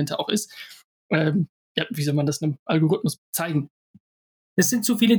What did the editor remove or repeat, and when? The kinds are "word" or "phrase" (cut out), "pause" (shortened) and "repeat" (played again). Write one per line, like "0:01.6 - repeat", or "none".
0:03.2 - pause